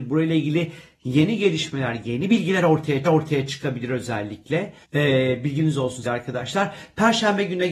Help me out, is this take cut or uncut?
cut